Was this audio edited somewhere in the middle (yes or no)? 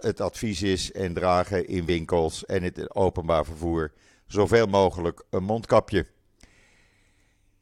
no